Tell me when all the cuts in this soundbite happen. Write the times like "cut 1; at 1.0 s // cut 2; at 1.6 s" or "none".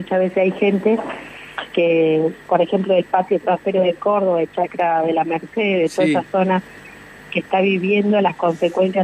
cut 1; at 2.4 s